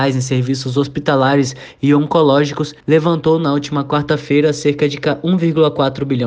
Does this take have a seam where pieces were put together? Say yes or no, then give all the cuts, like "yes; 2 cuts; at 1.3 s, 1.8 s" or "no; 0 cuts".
yes; 1 cut; at 2.8 s